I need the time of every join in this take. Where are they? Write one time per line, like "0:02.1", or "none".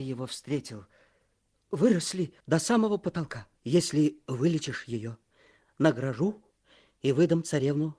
0:02.4
0:03.6